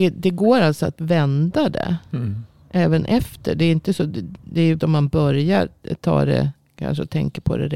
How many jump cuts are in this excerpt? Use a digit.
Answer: 1